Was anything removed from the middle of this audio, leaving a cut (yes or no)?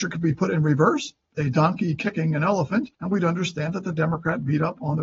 yes